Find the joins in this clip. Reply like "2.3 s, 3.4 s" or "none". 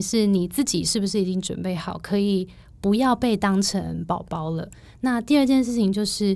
none

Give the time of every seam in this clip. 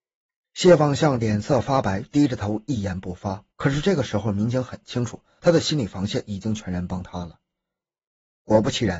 3.5 s

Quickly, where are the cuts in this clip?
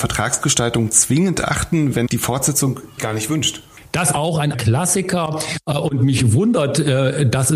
2.1 s, 3.0 s, 4.1 s, 4.5 s

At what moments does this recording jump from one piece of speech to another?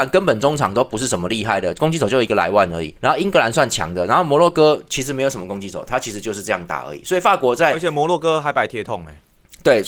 3.0 s

